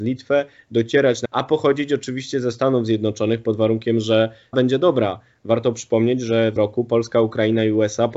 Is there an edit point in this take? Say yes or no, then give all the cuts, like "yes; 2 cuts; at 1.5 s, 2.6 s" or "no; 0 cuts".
yes; 3 cuts; at 1.2 s, 4.5 s, 6.6 s